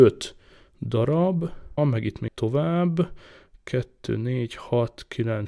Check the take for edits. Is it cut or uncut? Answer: cut